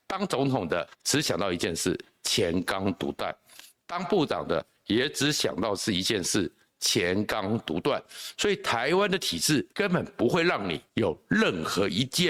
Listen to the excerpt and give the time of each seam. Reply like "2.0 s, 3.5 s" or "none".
0.9 s, 9.7 s, 10.9 s